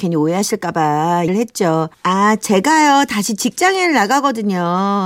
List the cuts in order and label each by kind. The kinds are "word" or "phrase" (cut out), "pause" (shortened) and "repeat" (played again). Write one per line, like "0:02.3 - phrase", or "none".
0:01.3 - word
0:01.9 - pause